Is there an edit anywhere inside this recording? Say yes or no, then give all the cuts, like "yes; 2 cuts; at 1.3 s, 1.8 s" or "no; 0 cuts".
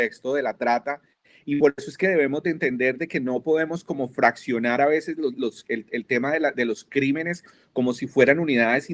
no; 0 cuts